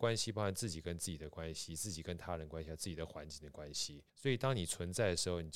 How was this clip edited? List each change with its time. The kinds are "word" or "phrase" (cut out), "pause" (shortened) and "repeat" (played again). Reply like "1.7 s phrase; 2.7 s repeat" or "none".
4.1 s pause